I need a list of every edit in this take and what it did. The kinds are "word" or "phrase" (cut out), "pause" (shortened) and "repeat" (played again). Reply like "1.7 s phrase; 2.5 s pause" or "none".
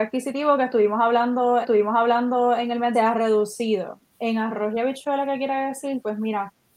1.6 s repeat; 2.9 s phrase